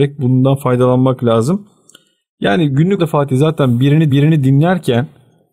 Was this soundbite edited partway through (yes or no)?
yes